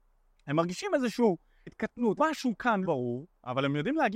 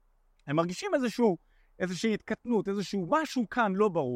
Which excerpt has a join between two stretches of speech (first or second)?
first